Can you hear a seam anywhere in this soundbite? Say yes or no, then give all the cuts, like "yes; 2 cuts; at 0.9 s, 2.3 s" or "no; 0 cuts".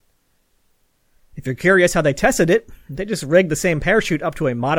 no; 0 cuts